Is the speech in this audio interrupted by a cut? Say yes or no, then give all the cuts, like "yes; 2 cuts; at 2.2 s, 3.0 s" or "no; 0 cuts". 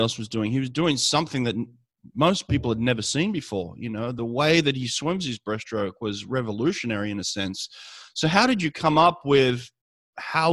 no; 0 cuts